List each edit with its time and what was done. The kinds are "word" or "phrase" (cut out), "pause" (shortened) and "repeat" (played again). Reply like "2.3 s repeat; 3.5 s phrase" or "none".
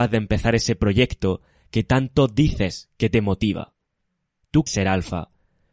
4.7 s word